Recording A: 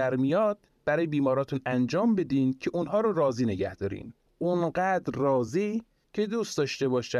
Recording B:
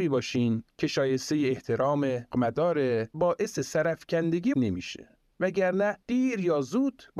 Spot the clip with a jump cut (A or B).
B